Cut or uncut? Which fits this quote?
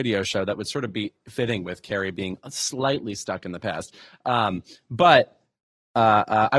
uncut